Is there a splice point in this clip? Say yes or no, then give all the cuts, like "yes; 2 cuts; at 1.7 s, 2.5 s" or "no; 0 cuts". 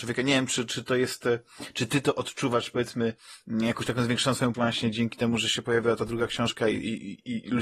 yes; 1 cut; at 4.5 s